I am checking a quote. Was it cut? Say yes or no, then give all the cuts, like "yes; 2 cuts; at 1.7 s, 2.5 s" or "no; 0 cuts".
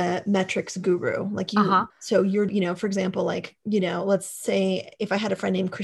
yes; 3 cuts; at 1.9 s, 2.5 s, 3.6 s